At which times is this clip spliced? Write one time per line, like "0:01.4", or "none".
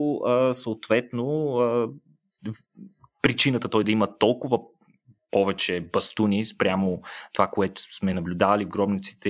none